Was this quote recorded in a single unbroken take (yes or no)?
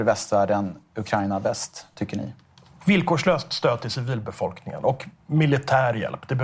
yes